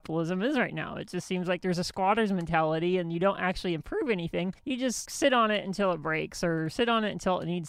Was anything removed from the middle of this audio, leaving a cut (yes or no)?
yes